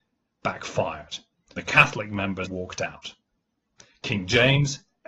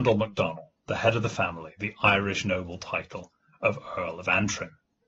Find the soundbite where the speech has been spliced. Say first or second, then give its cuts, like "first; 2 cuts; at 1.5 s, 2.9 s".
first; 2 cuts; at 1.6 s, 2.4 s